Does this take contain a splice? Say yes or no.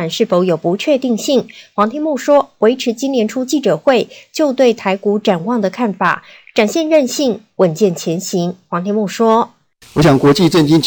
no